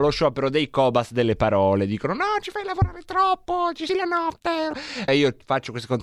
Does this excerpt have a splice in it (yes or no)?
yes